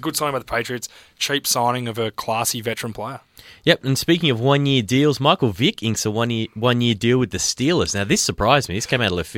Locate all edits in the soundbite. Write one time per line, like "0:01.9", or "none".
none